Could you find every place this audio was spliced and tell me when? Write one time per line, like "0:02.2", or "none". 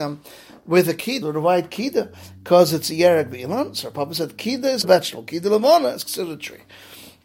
0:01.2
0:04.8